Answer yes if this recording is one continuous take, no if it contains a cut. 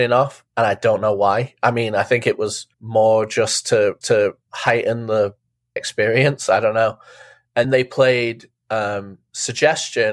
no